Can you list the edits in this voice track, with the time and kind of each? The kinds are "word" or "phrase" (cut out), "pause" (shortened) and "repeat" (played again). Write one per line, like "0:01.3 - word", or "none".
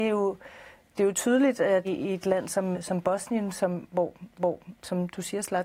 0:01.8 - word
0:02.7 - word
0:04.3 - repeat